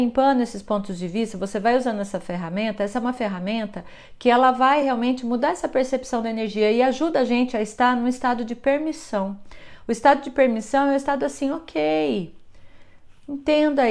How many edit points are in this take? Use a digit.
0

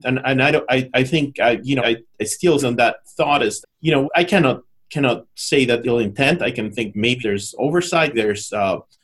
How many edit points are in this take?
7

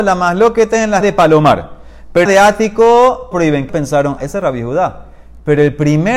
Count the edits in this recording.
5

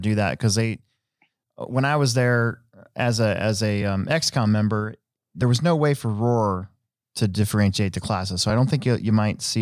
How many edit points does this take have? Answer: 0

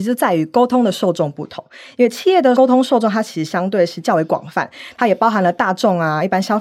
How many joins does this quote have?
0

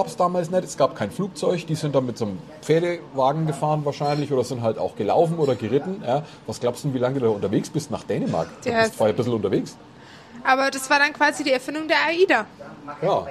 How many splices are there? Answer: 0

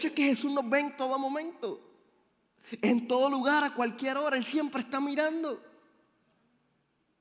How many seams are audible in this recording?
0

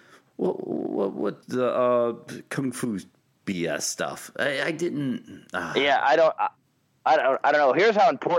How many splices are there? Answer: 1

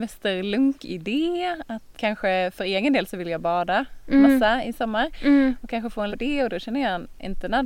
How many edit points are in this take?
2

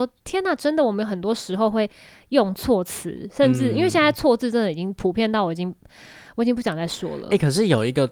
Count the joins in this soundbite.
0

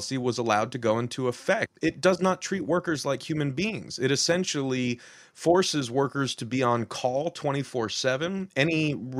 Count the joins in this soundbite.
0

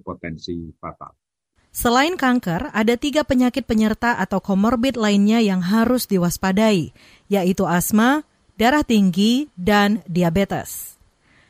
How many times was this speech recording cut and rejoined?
0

